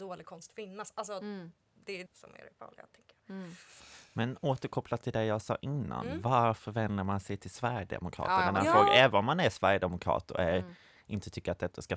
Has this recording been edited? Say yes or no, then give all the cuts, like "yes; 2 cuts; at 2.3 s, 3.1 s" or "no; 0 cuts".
yes; 2 cuts; at 2.1 s, 3.2 s